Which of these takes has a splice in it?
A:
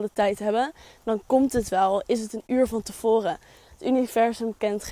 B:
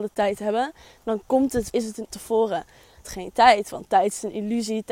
B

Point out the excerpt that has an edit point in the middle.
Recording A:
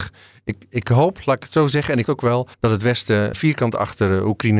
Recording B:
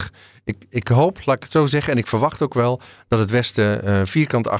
A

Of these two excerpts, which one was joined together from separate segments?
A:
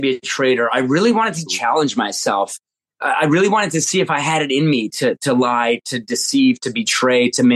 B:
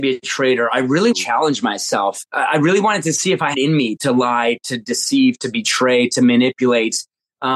B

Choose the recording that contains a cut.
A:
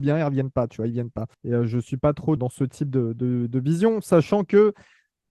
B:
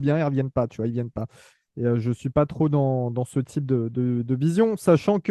A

